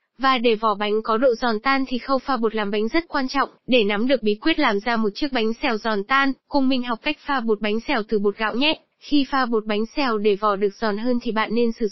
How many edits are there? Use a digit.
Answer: 2